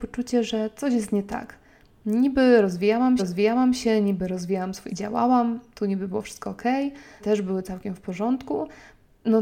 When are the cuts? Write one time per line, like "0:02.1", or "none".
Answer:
0:03.2
0:04.9
0:07.2